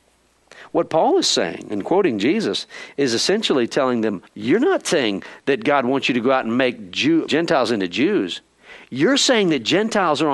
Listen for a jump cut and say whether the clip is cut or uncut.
cut